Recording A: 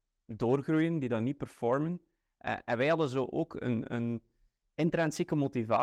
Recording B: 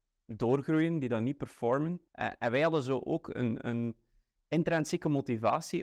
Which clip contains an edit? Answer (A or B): B